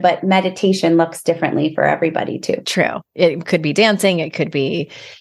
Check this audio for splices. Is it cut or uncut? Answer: uncut